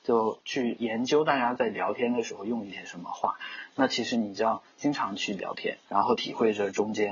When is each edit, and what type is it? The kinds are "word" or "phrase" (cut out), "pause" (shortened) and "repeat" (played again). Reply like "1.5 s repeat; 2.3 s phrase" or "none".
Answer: 5.8 s pause